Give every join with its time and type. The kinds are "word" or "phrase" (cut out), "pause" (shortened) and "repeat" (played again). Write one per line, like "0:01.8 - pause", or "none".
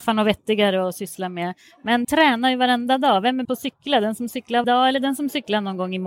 0:02.0 - word
0:03.4 - word
0:04.6 - word